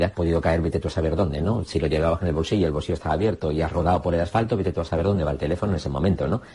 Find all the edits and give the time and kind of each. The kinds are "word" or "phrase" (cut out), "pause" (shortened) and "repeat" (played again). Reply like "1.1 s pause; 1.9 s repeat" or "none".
none